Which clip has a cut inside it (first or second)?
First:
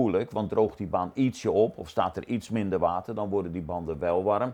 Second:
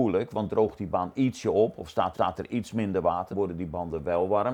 second